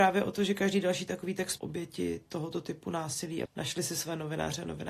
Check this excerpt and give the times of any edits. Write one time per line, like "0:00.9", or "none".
0:01.6
0:03.5